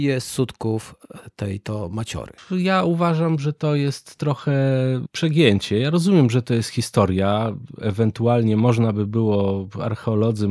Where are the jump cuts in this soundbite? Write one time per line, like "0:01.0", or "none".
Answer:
0:02.4